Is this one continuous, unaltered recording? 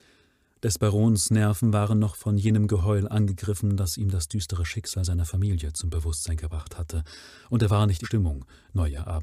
no; 1 cut; at 8.0 s

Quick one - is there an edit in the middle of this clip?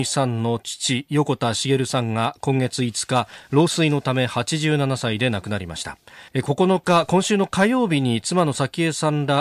yes; 1 cut; at 6.3 s

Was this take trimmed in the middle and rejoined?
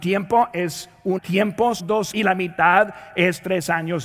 yes; 3 cuts; at 1.2 s, 1.8 s, 2.1 s

